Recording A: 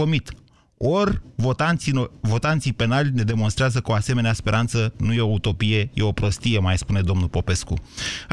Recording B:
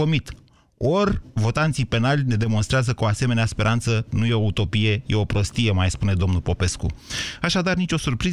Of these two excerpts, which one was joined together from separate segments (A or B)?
B